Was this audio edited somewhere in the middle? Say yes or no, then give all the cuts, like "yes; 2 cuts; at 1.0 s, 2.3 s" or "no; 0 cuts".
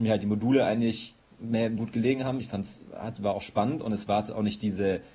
yes; 1 cut; at 1.8 s